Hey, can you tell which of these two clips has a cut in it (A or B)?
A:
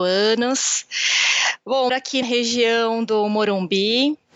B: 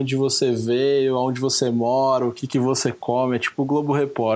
A